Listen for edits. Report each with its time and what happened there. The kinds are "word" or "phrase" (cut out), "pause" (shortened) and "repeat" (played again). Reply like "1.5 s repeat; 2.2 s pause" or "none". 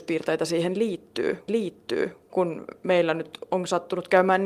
1.5 s repeat